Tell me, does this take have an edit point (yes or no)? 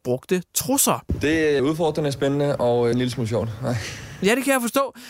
yes